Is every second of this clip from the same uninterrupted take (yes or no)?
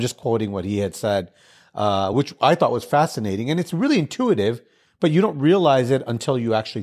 yes